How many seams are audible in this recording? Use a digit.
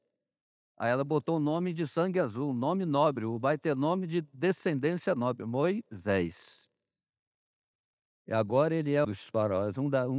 1